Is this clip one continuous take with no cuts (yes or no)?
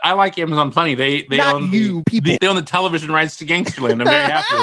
no